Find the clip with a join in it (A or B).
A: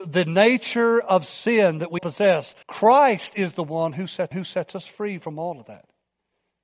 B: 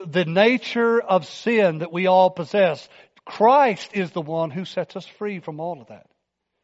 A